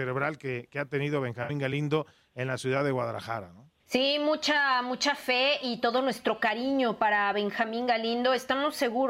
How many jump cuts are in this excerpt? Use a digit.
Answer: 1